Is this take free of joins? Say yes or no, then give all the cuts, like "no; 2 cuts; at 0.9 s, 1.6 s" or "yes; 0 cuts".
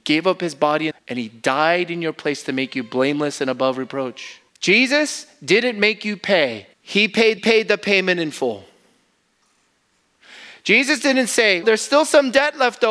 no; 5 cuts; at 0.9 s, 4.5 s, 6.7 s, 7.4 s, 11.6 s